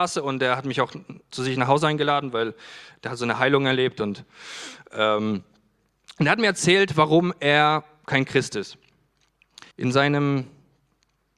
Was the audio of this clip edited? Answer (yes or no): yes